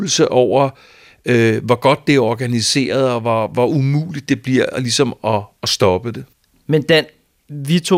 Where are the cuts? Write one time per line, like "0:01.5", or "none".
none